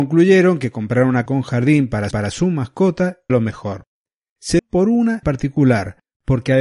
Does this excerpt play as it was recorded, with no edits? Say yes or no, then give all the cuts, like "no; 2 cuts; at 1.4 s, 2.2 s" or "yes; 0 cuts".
no; 5 cuts; at 1.3 s, 2.1 s, 3.3 s, 4.6 s, 5.2 s